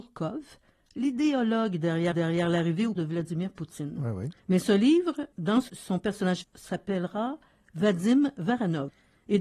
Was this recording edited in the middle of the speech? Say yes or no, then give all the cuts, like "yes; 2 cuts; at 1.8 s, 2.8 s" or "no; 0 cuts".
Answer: yes; 6 cuts; at 2.1 s, 3.0 s, 4.4 s, 5.3 s, 5.7 s, 6.4 s